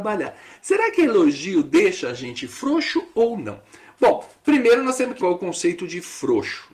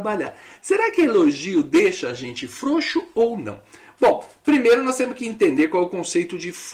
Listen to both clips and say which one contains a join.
first; 1 cut; at 5.2 s

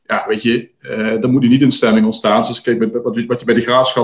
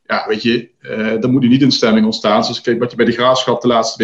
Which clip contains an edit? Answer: second; 1 cut; at 2.8 s

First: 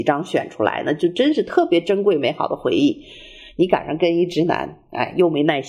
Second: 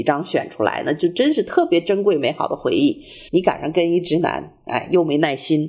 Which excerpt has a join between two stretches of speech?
second; 1 cut; at 3.3 s

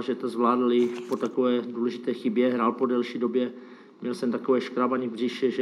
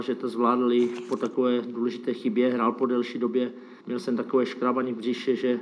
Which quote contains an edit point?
second; 1 cut; at 3.8 s

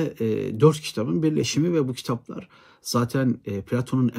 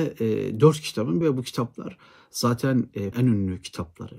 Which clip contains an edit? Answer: second; 2 cuts; at 1.2 s, 3.1 s

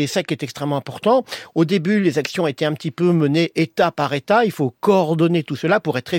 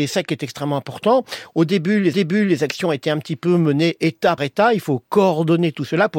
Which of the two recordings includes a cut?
second; 2 cuts; at 2.1 s, 4.4 s

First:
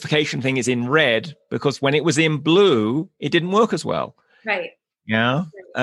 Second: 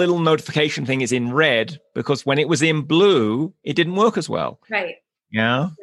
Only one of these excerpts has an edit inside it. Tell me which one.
second; 1 cut; at 4.6 s

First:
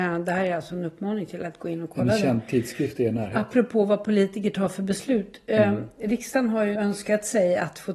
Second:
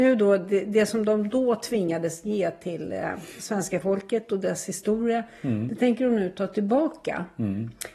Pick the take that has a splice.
first; 1 cut; at 6.7 s

